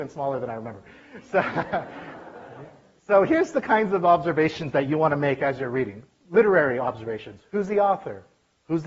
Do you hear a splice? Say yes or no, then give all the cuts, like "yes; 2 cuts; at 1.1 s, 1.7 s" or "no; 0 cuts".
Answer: no; 0 cuts